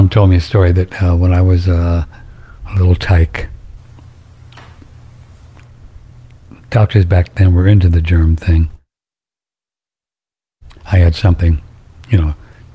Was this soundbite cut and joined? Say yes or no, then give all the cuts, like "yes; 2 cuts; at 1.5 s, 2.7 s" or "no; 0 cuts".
no; 0 cuts